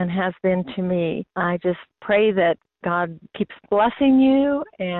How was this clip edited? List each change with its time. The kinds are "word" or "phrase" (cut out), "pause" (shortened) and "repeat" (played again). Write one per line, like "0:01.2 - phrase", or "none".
0:01.3 - pause